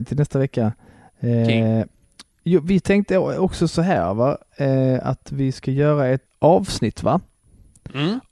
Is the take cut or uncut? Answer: uncut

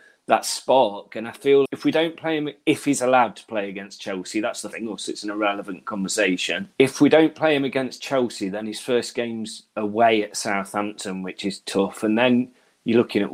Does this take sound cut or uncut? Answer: cut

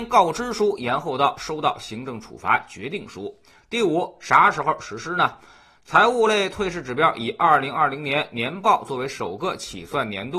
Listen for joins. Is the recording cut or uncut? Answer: uncut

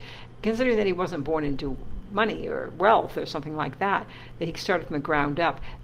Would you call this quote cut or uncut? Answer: uncut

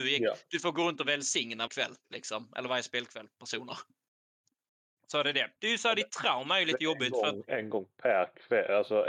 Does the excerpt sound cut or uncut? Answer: cut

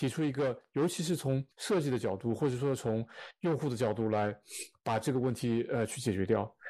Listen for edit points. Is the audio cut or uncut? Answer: cut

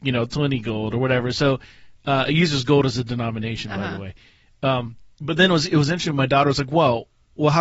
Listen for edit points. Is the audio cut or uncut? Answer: cut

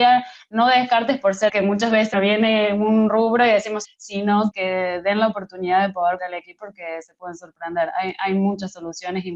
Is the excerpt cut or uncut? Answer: cut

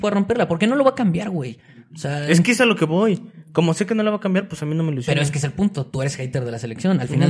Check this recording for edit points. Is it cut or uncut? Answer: uncut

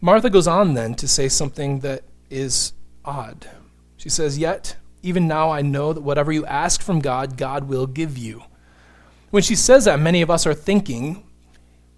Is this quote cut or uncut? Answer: uncut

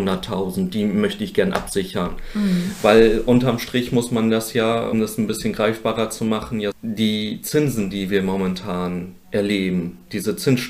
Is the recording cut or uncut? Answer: cut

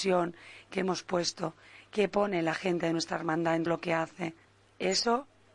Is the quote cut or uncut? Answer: cut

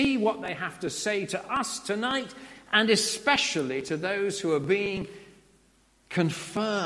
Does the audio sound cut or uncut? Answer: uncut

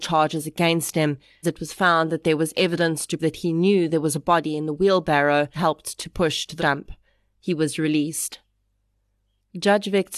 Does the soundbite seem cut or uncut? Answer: cut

